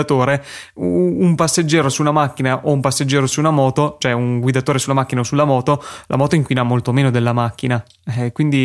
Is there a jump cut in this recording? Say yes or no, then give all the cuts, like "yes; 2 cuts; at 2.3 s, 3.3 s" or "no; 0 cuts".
no; 0 cuts